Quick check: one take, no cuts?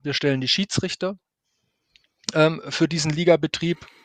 yes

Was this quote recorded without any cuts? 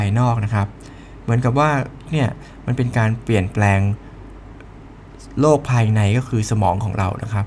no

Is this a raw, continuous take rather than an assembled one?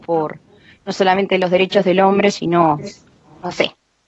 yes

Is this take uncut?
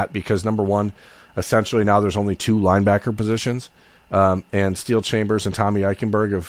yes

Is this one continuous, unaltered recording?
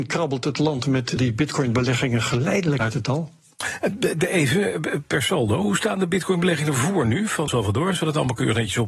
no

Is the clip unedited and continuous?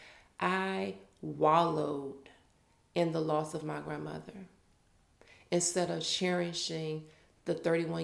yes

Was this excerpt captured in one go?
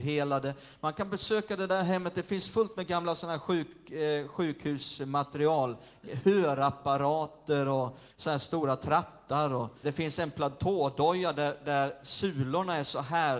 no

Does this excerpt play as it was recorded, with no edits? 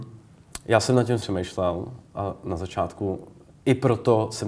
no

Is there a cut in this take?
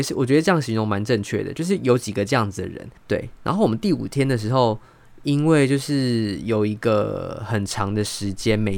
yes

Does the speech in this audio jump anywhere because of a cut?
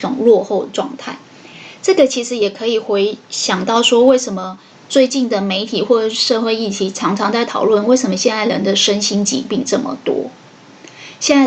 yes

